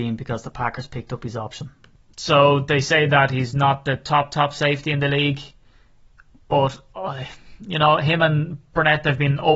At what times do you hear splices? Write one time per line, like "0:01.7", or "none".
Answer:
none